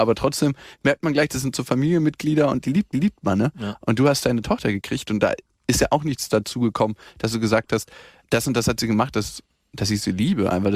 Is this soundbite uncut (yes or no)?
no